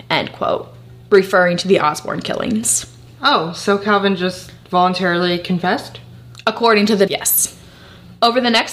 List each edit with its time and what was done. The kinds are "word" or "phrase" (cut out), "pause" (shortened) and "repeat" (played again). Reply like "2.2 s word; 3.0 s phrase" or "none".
7.1 s word